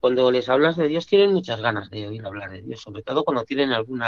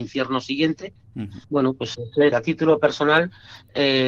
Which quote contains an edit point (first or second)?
second